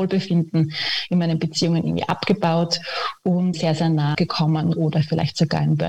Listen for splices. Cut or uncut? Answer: cut